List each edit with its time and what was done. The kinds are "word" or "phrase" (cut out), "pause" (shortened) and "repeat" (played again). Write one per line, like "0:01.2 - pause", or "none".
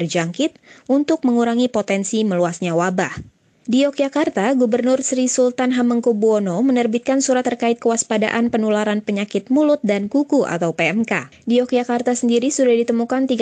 0:03.5 - pause
0:07.4 - word